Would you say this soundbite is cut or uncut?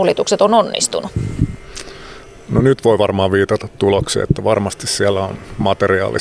uncut